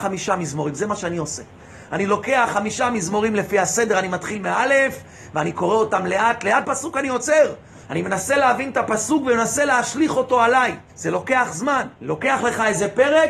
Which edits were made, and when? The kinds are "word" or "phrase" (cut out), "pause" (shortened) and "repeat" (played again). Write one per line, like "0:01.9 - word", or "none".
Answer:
0:06.6 - phrase
0:07.8 - pause
0:10.9 - pause
0:12.0 - pause

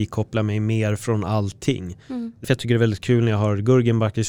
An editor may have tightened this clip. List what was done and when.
0:02.4 - word

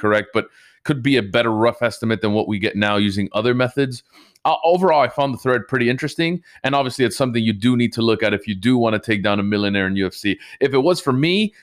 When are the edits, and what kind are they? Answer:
none

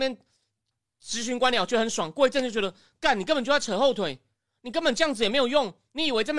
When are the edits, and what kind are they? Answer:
none

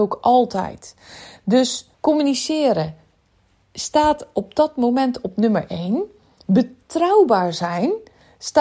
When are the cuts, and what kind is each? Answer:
0:01.9 - pause

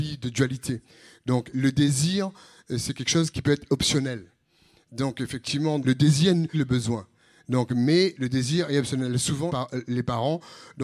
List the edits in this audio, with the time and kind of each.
0:01.5 - word
0:03.3 - word
0:05.8 - word
0:06.5 - word
0:08.2 - word
0:09.5 - word

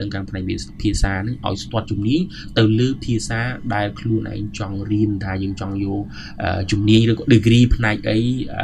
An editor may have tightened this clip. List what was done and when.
none

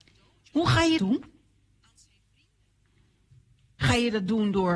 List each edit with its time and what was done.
0:01.0 - word

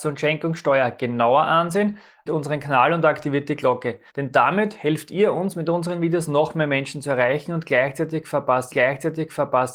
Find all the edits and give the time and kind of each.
0:02.3 - word
0:04.1 - pause
0:08.7 - repeat

